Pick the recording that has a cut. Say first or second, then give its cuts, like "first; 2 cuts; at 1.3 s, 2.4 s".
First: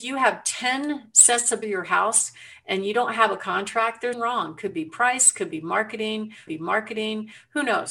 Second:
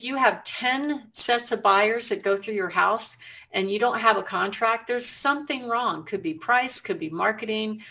first; 3 cuts; at 1.6 s, 4.1 s, 6.5 s